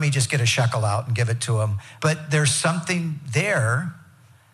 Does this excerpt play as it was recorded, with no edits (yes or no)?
yes